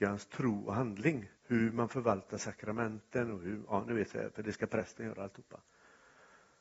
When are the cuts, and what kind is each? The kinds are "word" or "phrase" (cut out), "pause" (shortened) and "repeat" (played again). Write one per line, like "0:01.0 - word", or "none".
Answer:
0:01.4 - pause